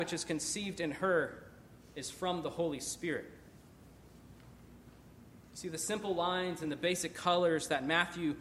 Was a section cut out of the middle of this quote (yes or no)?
no